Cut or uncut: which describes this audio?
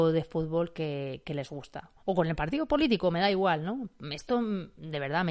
cut